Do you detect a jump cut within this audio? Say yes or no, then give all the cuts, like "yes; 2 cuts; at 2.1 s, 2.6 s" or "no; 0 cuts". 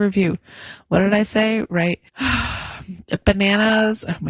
yes; 1 cut; at 2.1 s